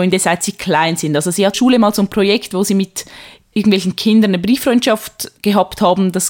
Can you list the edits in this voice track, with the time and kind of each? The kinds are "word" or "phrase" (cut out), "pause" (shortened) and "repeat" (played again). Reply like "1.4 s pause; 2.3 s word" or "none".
1.5 s phrase; 3.5 s word; 5.4 s pause